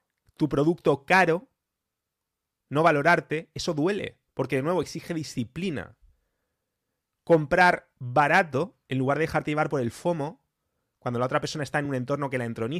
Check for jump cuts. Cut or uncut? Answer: uncut